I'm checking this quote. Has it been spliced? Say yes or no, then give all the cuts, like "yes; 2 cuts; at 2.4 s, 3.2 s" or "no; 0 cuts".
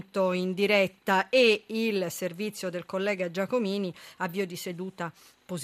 no; 0 cuts